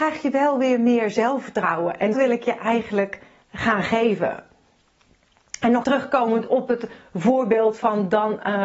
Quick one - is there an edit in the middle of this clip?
yes; 2 cuts; at 2.1 s, 5.8 s

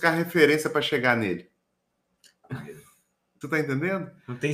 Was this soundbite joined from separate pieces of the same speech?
yes; 2 cuts; at 2.4 s, 3.4 s

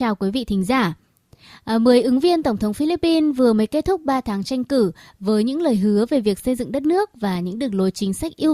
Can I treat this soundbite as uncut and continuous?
yes; 0 cuts

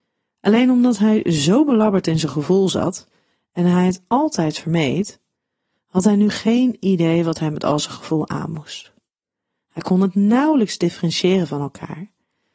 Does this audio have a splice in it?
no; 0 cuts

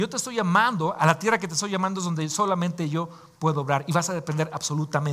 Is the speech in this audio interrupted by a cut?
no; 0 cuts

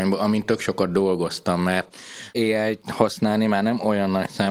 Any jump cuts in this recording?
no; 0 cuts

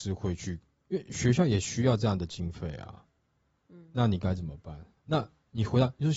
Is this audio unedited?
no; 1 cut; at 5.0 s

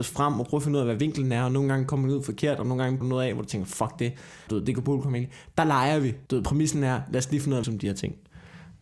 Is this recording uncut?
no; 4 cuts; at 3.0 s, 4.5 s, 6.3 s, 7.6 s

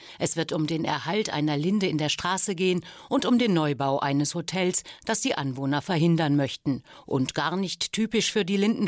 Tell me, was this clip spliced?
no; 0 cuts

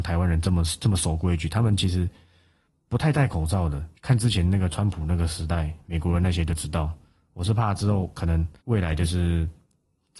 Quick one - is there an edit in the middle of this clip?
yes; 2 cuts; at 4.0 s, 8.6 s

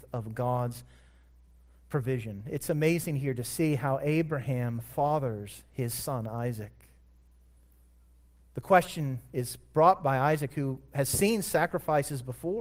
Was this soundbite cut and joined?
no; 0 cuts

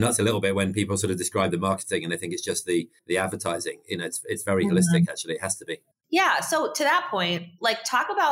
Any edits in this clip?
yes; 2 cuts; at 3.0 s, 5.9 s

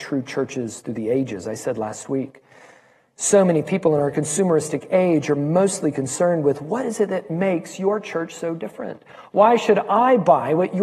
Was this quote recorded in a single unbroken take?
yes; 0 cuts

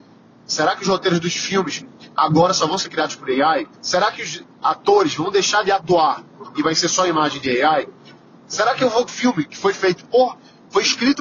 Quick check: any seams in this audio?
yes; 2 cuts; at 3.7 s, 9.1 s

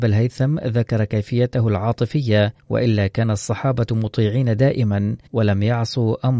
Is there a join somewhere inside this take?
yes; 2 cuts; at 2.6 s, 5.3 s

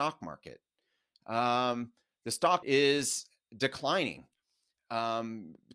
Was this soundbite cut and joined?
yes; 1 cut; at 2.6 s

